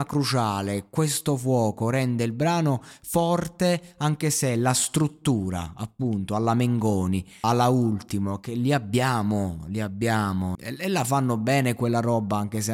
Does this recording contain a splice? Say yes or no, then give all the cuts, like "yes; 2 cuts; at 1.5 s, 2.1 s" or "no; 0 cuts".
yes; 2 cuts; at 7.4 s, 10.5 s